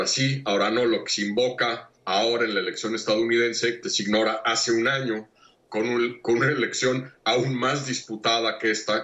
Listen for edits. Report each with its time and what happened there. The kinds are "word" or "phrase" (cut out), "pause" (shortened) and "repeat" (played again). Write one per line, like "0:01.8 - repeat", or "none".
0:02.0 - pause
0:03.8 - word